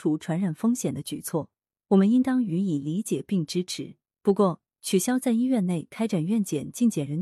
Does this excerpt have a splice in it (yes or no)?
no